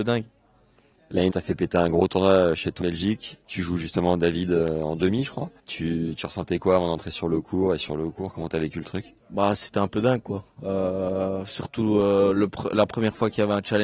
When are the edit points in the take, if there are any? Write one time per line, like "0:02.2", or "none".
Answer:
0:01.3
0:02.8
0:05.6
0:09.2